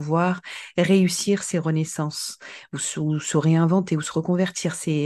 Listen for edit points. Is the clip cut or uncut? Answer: uncut